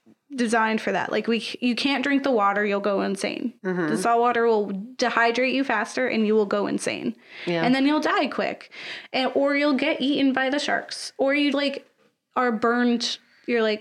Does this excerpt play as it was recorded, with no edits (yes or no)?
no